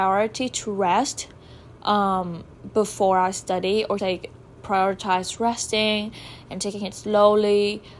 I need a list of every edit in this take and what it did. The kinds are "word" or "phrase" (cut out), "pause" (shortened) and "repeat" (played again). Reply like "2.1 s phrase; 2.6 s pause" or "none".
4.0 s word